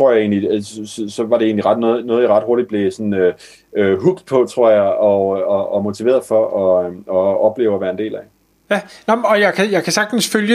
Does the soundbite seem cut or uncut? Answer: uncut